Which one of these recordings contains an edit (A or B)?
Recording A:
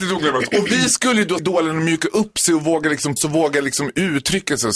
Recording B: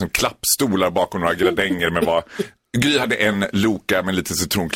A